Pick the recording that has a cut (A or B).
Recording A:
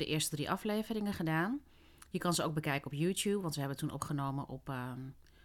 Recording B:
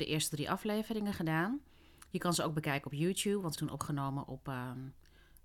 B